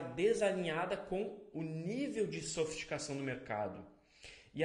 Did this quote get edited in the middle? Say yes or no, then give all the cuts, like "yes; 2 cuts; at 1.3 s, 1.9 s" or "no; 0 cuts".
no; 0 cuts